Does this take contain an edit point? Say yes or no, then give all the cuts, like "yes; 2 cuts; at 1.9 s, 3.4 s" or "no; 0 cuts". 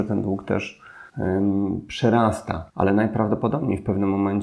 yes; 2 cuts; at 1.1 s, 2.7 s